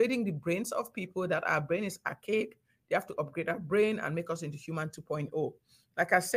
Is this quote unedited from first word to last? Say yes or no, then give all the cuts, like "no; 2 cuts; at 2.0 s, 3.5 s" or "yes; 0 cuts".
yes; 0 cuts